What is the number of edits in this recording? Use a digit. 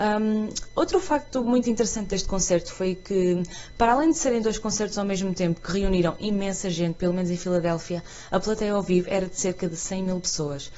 0